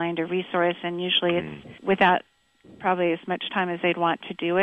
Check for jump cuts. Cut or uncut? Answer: cut